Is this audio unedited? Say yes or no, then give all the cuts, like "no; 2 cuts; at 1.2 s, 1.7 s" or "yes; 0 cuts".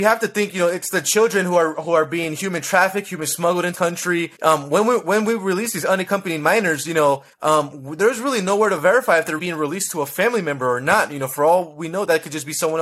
no; 4 cuts; at 3.7 s, 4.4 s, 7.3 s, 9.4 s